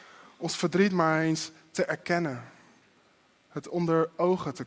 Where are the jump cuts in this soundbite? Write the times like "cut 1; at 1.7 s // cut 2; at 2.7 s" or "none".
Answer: none